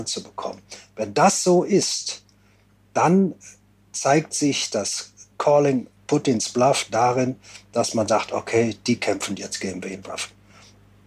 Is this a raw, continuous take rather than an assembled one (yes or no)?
yes